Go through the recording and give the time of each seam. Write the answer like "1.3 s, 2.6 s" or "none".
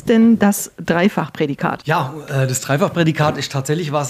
none

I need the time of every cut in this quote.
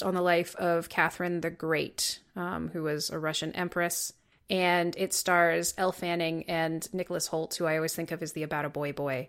4.3 s

